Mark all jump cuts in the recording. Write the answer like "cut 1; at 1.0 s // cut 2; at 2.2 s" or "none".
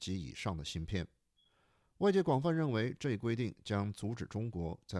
none